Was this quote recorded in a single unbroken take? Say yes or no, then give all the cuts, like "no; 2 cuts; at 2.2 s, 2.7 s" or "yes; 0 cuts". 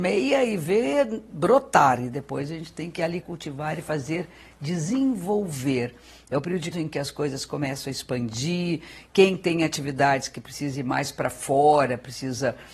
no; 2 cuts; at 3.2 s, 6.7 s